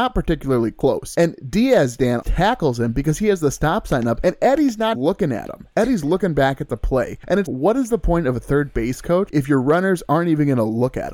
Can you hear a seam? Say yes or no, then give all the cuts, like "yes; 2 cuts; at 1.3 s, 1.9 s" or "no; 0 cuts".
yes; 3 cuts; at 2.2 s, 4.9 s, 7.5 s